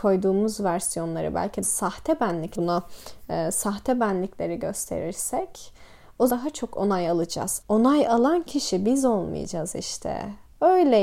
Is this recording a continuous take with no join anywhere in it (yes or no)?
no